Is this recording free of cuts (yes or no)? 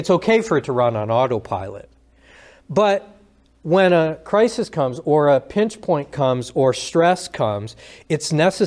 yes